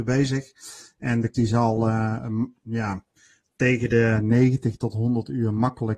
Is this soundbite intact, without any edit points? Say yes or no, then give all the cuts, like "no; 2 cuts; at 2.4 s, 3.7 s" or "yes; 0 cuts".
no; 1 cut; at 1.3 s